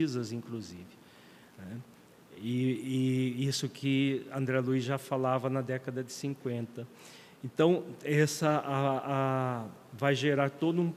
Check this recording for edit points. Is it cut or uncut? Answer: uncut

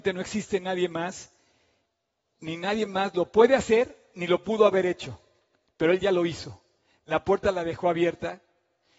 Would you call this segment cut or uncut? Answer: uncut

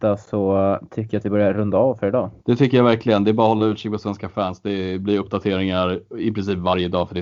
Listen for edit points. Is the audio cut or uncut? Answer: cut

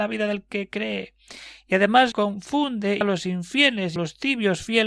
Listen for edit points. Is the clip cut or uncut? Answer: cut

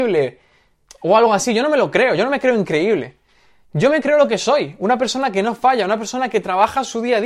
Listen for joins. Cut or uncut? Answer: uncut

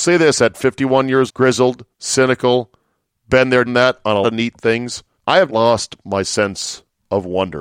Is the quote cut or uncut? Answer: cut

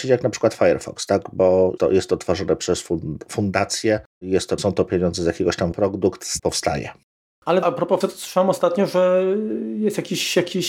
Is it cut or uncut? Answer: cut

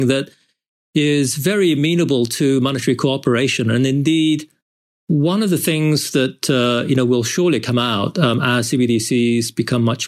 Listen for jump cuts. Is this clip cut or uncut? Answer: uncut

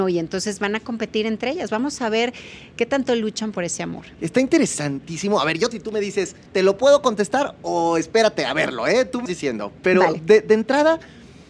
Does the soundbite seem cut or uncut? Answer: cut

